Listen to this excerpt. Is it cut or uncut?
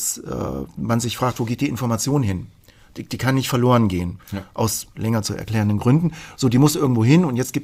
uncut